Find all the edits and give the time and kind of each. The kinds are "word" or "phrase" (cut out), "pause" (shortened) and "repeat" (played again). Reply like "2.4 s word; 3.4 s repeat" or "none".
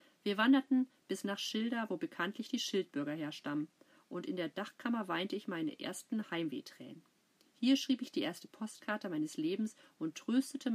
none